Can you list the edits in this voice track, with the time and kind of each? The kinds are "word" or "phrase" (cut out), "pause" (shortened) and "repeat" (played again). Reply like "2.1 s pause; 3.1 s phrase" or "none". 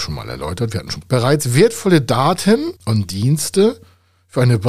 1.0 s word; 2.8 s pause